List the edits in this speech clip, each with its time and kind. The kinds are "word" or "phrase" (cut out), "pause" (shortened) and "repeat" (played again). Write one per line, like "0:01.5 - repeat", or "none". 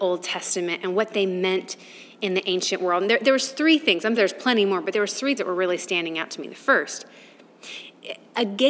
0:04.2 - word
0:05.4 - word